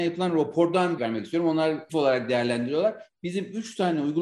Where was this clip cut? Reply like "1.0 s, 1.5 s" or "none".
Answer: 1.0 s, 1.9 s